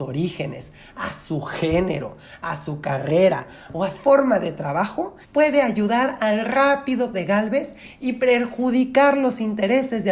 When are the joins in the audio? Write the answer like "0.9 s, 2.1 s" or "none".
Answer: 3.9 s, 5.2 s, 7.1 s